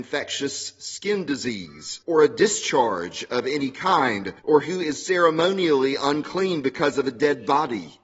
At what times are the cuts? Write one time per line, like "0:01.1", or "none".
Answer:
0:02.0
0:04.4